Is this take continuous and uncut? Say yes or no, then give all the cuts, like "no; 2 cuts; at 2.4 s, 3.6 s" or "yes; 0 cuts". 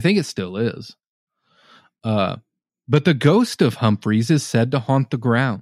yes; 0 cuts